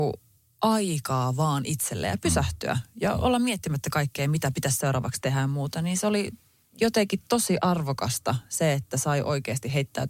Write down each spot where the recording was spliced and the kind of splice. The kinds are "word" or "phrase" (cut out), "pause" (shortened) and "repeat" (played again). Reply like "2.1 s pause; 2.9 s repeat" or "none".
none

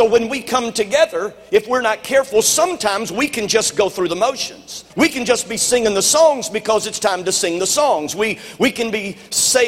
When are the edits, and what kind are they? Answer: 4.9 s pause

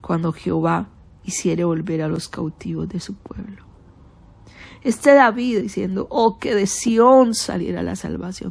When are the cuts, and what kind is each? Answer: 5.6 s word

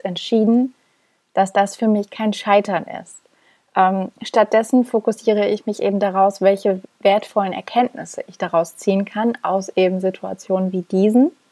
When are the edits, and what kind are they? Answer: none

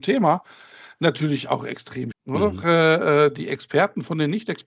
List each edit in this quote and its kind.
2.1 s word

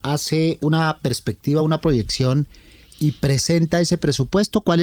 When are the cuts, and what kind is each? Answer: none

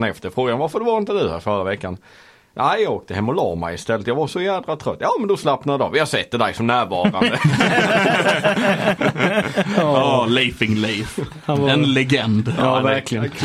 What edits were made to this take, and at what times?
none

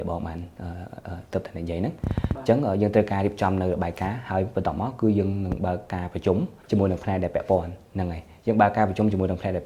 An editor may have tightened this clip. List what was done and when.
6.6 s pause

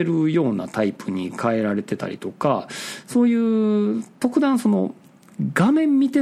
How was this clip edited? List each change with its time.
none

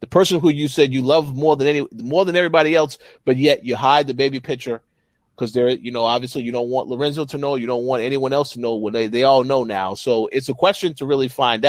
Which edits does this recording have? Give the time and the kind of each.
none

